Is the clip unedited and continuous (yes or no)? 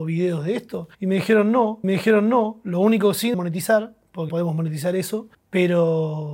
no